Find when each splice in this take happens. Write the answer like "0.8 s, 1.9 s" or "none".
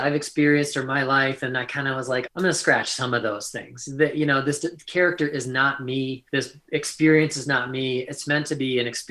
2.3 s, 6.3 s